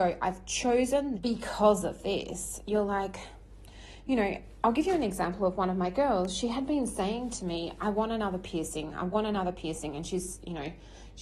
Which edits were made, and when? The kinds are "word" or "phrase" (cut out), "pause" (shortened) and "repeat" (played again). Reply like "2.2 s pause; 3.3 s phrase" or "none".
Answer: 1.1 s word